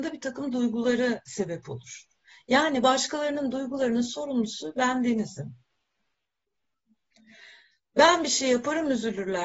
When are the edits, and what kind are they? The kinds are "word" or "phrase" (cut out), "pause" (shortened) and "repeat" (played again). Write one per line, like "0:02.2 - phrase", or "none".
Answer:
none